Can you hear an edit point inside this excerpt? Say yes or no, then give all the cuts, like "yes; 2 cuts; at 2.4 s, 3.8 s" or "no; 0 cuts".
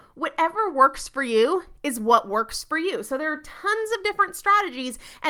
no; 0 cuts